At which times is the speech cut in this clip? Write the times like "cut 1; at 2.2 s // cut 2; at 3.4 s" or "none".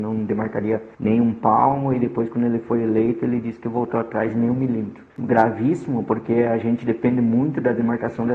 cut 1; at 0.9 s // cut 2; at 5.1 s